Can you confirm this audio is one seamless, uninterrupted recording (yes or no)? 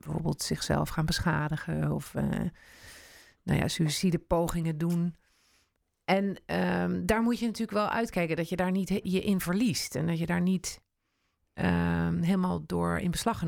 yes